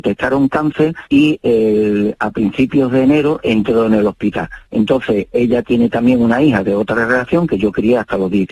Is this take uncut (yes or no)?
no